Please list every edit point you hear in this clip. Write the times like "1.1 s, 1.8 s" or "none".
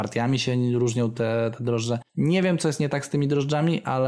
2.1 s